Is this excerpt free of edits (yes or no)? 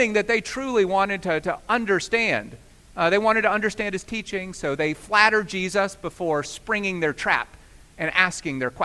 yes